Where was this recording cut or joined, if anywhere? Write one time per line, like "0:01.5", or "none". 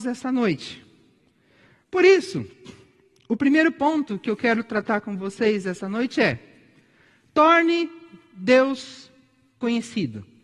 none